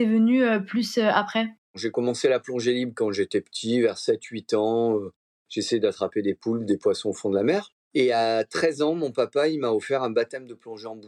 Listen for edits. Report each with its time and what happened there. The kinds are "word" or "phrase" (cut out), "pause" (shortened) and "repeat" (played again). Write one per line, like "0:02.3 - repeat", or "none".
0:01.6 - pause
0:07.9 - pause